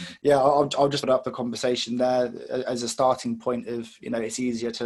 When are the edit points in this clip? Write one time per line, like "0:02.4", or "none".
0:01.0